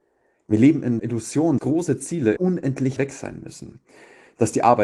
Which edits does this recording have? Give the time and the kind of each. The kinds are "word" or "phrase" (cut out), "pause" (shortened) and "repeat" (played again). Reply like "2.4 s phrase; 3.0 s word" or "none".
1.0 s word; 1.6 s word; 2.4 s word; 3.0 s word